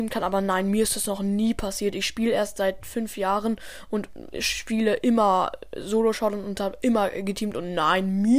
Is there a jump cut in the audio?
no; 0 cuts

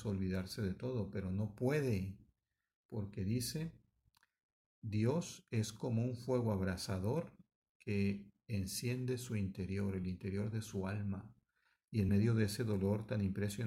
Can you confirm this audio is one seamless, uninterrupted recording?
yes; 0 cuts

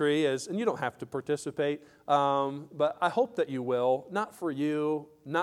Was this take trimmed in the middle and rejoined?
no; 0 cuts

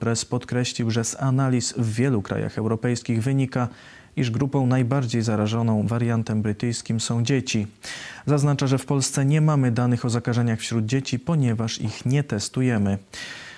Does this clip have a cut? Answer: no; 0 cuts

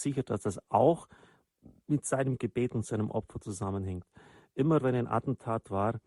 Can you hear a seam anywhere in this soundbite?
no; 0 cuts

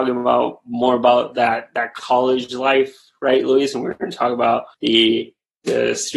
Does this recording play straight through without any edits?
no; 1 cut; at 4.7 s

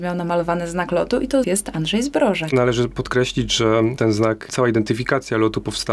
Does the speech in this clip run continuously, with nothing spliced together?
no; 1 cut; at 1.4 s

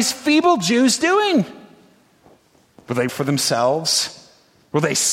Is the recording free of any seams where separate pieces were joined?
no; 1 cut; at 3.1 s

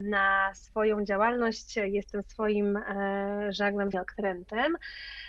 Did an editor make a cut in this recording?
yes; 1 cut; at 3.9 s

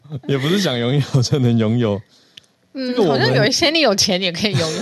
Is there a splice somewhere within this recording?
no; 0 cuts

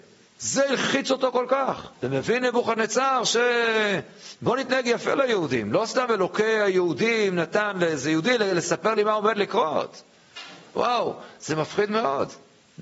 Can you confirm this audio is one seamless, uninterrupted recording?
no; 1 cut; at 1.9 s

